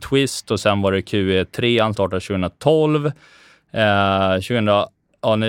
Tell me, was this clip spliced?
yes; 1 cut; at 1.9 s

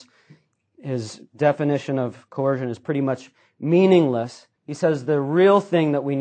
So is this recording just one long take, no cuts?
no; 1 cut; at 4.6 s

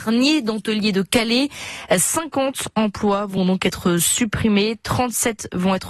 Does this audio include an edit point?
no; 0 cuts

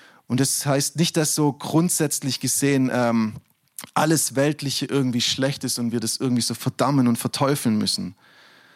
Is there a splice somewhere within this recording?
no; 0 cuts

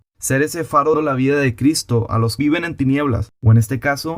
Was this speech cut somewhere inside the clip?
yes; 2 cuts; at 0.9 s, 2.4 s

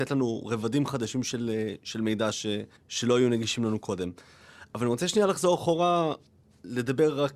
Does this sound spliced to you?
yes; 1 cut; at 2.8 s

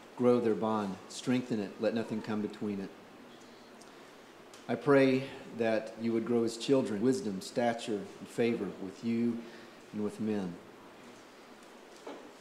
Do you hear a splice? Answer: yes; 1 cut; at 7.0 s

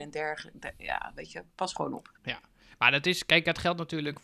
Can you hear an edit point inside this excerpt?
yes; 1 cut; at 2.1 s

